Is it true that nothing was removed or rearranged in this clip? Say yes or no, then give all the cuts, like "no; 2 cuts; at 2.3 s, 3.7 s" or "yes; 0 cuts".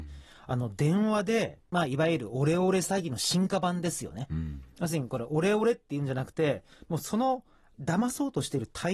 no; 1 cut; at 1.7 s